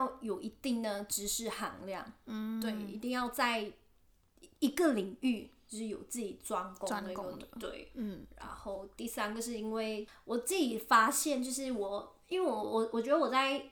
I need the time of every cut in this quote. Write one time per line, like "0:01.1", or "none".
0:04.5